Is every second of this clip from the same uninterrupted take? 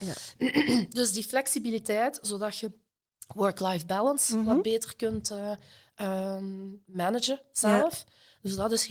yes; 0 cuts

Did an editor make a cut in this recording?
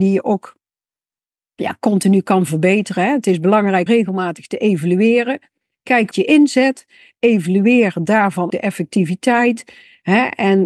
yes; 3 cuts; at 3.9 s, 6.1 s, 8.5 s

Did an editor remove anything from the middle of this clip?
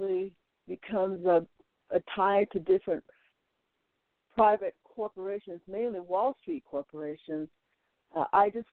no; 0 cuts

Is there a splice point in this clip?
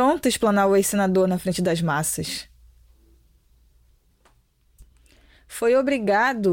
no; 0 cuts

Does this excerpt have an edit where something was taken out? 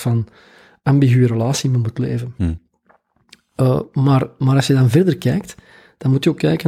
no; 0 cuts

